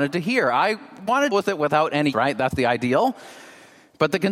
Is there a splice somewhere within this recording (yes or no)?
yes